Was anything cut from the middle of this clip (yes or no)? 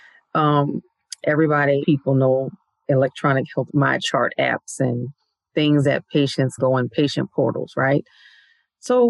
yes